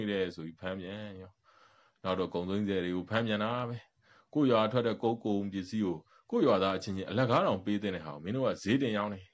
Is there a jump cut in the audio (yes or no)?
no